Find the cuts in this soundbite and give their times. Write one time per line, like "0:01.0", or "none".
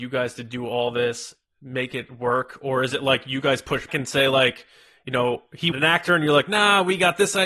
0:03.9
0:05.7